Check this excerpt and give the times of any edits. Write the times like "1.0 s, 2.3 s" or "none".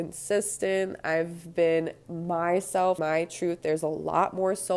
3.0 s